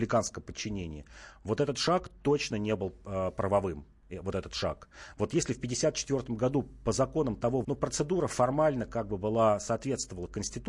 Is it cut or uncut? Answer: cut